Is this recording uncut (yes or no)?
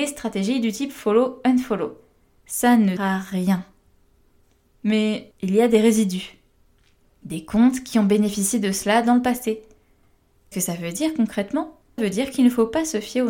no